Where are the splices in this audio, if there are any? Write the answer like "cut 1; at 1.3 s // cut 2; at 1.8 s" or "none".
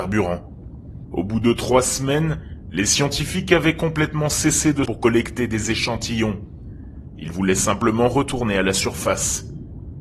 cut 1; at 4.9 s